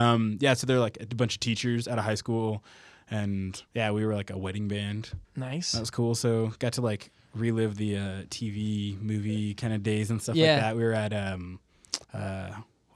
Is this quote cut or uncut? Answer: cut